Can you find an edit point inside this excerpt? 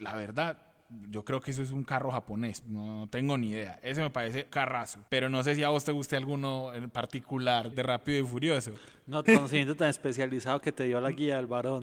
yes; 5 cuts; at 2.6 s, 4.5 s, 5.1 s, 7.7 s, 9.3 s

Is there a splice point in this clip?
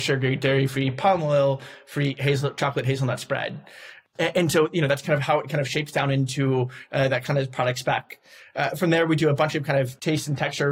no; 0 cuts

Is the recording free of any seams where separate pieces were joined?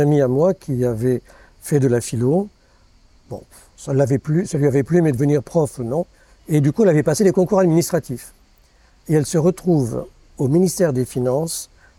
yes; 0 cuts

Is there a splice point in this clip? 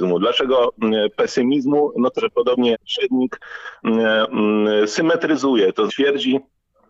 yes; 3 cuts; at 2.2 s, 2.7 s, 5.9 s

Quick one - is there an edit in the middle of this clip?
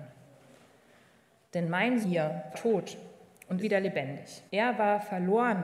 yes; 4 cuts; at 2.0 s, 2.5 s, 3.6 s, 4.5 s

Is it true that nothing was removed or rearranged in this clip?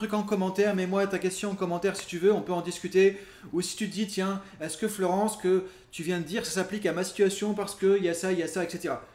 yes; 0 cuts

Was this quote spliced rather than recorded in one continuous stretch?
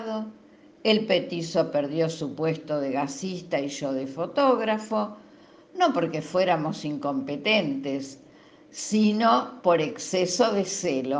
no; 0 cuts

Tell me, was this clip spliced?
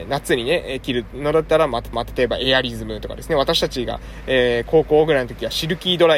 yes; 1 cut; at 1.9 s

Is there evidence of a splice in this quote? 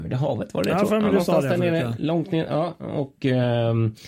no; 0 cuts

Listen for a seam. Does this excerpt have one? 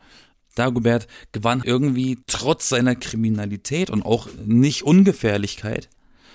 yes; 2 cuts; at 1.6 s, 2.2 s

